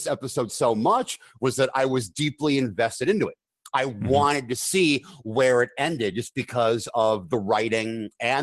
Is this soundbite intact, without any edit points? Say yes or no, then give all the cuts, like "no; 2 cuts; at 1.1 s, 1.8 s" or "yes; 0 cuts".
yes; 0 cuts